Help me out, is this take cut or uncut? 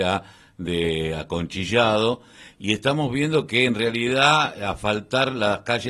uncut